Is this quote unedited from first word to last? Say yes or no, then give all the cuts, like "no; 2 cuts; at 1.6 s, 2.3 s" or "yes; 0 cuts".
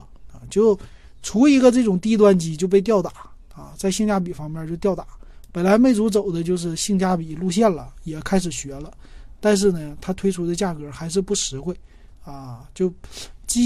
yes; 0 cuts